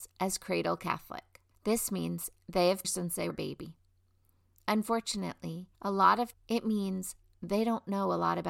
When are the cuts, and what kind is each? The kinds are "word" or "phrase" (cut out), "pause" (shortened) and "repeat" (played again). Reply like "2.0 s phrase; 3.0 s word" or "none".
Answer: 1.5 s pause; 2.8 s phrase; 3.3 s word; 5.7 s pause; 6.3 s word